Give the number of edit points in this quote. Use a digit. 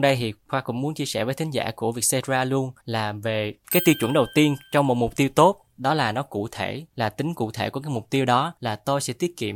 3